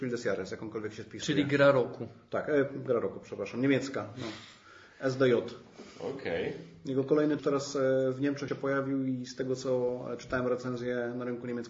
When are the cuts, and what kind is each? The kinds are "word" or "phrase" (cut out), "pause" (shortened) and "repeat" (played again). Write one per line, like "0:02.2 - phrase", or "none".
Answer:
0:07.4 - phrase
0:08.5 - word